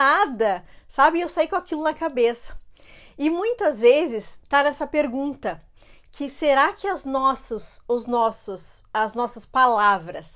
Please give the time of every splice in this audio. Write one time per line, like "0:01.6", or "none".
none